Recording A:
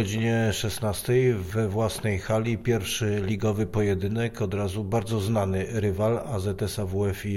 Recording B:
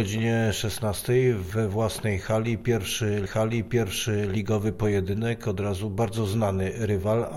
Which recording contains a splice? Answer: B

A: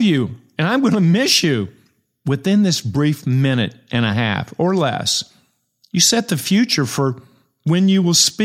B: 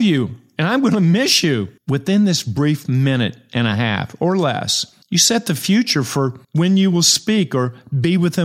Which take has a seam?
B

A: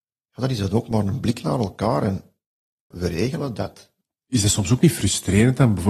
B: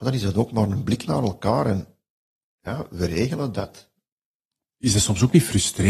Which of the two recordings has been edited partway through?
A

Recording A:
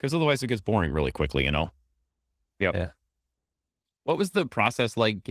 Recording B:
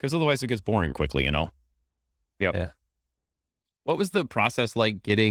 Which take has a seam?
B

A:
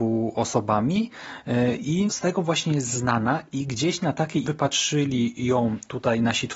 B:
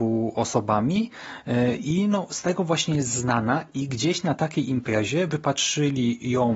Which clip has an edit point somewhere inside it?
A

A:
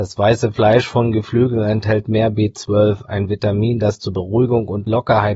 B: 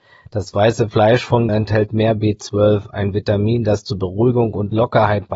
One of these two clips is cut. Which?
B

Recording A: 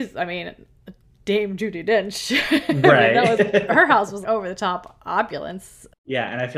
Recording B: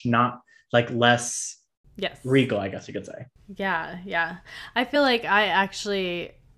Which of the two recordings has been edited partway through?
A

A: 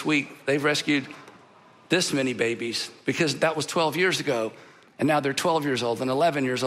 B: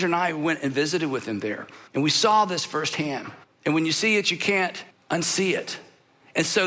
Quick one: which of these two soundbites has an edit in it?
B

